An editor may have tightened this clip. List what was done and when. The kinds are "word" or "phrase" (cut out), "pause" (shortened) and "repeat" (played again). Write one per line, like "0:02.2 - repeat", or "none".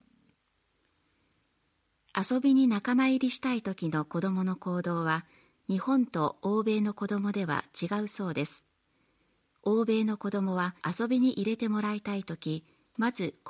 0:10.8 - pause